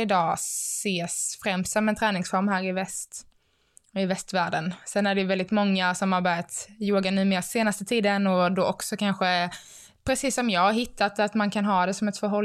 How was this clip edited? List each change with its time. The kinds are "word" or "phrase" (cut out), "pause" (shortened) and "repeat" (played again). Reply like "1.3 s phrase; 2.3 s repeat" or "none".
none